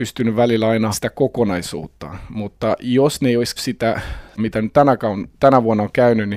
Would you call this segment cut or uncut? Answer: cut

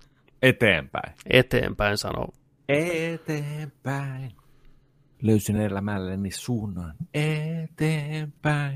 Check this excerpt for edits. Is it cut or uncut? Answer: uncut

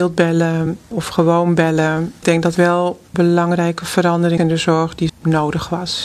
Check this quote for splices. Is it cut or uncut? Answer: cut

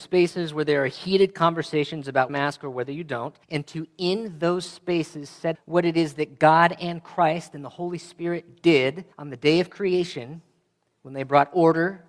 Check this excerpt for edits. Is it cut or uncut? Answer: cut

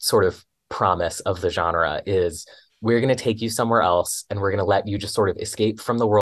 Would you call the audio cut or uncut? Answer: uncut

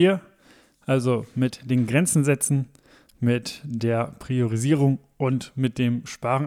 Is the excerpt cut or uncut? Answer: uncut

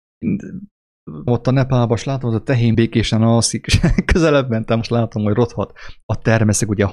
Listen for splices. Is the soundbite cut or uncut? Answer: cut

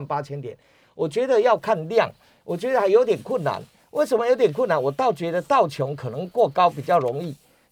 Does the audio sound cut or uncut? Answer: uncut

